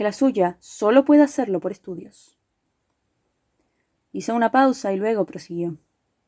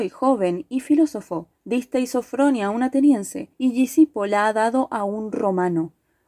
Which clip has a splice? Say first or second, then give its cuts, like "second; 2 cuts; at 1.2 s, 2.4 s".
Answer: second; 2 cuts; at 1.6 s, 3.5 s